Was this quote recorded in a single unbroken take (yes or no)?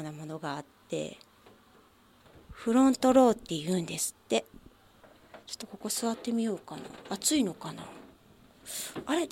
yes